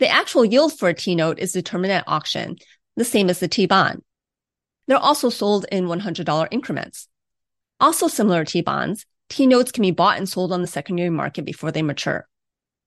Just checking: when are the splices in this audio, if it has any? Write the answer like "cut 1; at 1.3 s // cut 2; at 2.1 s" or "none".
none

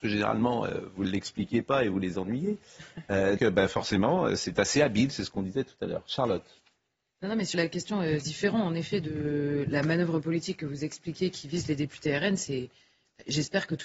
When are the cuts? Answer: cut 1; at 3.4 s // cut 2; at 7.5 s // cut 3; at 8.2 s

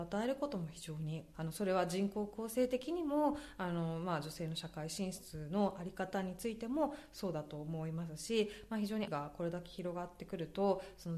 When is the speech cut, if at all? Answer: cut 1; at 9.1 s

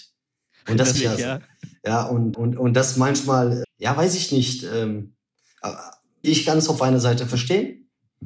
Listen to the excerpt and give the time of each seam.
cut 1; at 0.9 s // cut 2; at 2.3 s // cut 3; at 3.6 s // cut 4; at 6.2 s

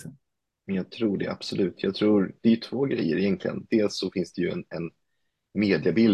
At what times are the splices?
none

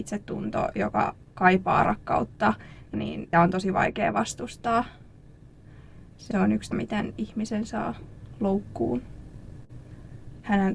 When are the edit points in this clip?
cut 1; at 2.9 s // cut 2; at 3.3 s // cut 3; at 6.3 s // cut 4; at 6.7 s

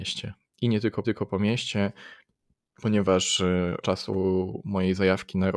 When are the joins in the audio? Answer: cut 1; at 1.0 s // cut 2; at 3.8 s

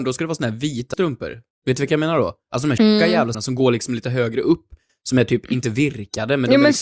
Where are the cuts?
cut 1; at 0.9 s // cut 2; at 2.8 s // cut 3; at 3.3 s

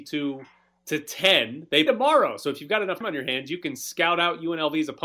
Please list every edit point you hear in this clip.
cut 1; at 1.9 s // cut 2; at 3.0 s

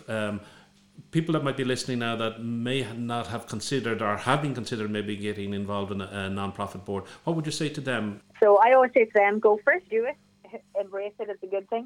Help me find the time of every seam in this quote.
cut 1; at 9.9 s

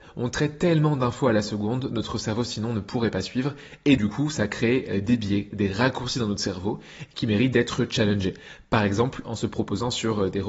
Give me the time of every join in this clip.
cut 1; at 4.0 s

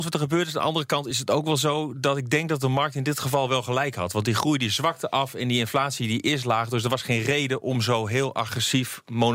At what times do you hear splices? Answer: none

